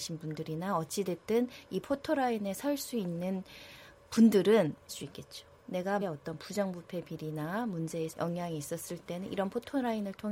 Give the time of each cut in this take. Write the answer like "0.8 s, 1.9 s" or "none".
4.9 s, 6.0 s, 8.1 s